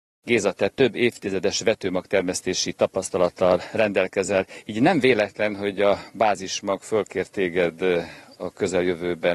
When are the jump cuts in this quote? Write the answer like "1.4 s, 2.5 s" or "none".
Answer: none